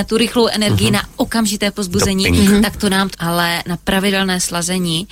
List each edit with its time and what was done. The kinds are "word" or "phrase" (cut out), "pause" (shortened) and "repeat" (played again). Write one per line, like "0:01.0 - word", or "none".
0:03.1 - word